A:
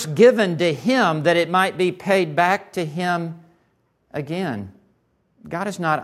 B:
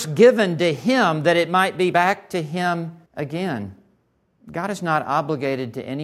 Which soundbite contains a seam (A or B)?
B